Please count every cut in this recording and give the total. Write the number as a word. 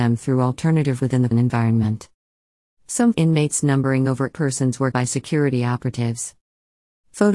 five